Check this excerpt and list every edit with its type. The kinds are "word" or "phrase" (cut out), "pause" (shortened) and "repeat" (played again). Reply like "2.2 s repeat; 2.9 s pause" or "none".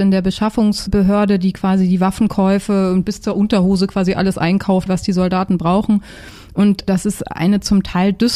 4.9 s phrase